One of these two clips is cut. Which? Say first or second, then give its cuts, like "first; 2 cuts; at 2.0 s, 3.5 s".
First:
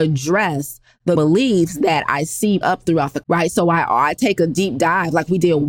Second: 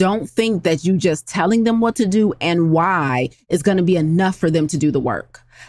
first; 3 cuts; at 1.2 s, 2.6 s, 3.2 s